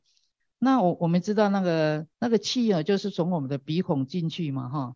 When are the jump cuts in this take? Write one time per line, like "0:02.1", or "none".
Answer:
0:02.1